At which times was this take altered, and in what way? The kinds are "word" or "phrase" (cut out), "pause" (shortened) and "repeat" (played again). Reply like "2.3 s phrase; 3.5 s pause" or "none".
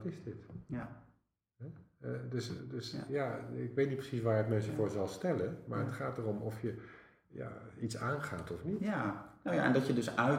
none